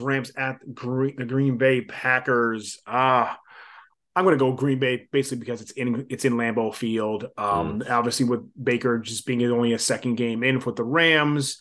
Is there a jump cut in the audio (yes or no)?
no